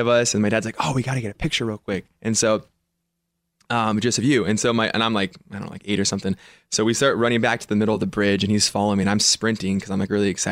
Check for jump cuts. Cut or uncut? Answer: uncut